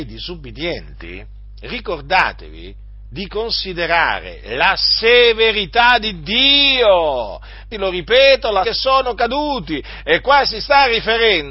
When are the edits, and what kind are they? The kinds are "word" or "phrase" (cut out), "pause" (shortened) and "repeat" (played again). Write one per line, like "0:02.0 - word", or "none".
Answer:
0:03.1 - word
0:07.7 - phrase
0:08.6 - phrase

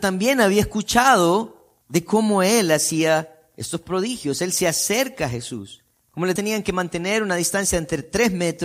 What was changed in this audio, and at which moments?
0:01.8 - pause
0:05.9 - pause
0:06.4 - phrase

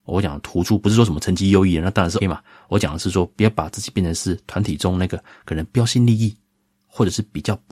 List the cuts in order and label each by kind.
0:02.2 - word

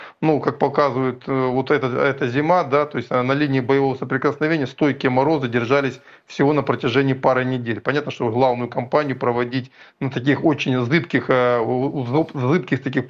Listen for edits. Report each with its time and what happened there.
none

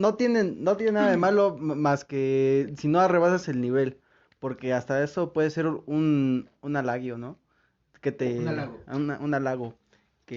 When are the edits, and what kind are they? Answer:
none

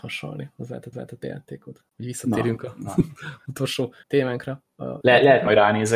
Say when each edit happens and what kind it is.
0:00.9 - repeat
0:04.0 - pause

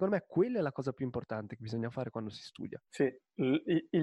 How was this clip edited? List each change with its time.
0:02.9 - pause

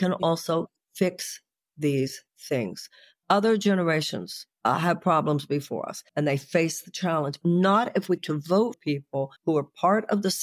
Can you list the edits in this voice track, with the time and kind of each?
0:02.3 - pause
0:04.5 - pause
0:06.1 - pause
0:07.4 - word
0:08.2 - word
0:08.7 - word
0:09.4 - pause

